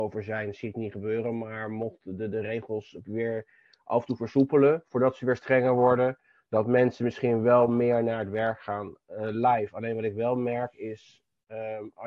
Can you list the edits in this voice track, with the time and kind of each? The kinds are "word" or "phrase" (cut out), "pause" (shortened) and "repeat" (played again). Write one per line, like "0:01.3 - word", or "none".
none